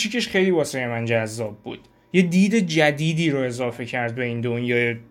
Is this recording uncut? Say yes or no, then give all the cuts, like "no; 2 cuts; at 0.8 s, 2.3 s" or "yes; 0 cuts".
yes; 0 cuts